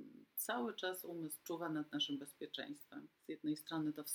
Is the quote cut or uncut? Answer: cut